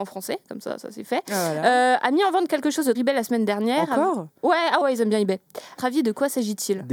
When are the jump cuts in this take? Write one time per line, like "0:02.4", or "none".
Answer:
0:02.9
0:04.8
0:05.8